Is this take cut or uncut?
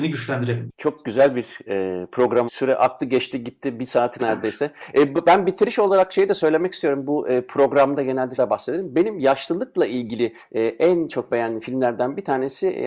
cut